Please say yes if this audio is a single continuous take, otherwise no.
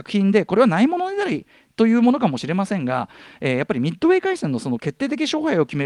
yes